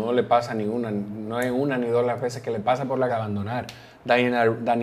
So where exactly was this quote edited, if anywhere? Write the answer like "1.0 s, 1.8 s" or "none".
3.1 s